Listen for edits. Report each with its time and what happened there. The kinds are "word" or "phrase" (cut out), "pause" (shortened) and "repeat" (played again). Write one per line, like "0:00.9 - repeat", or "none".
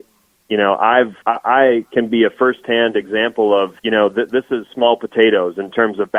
0:01.2 - pause
0:03.8 - pause